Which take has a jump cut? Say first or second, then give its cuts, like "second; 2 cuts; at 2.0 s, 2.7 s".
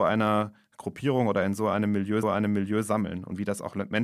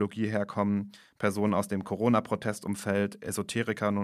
first; 1 cut; at 2.2 s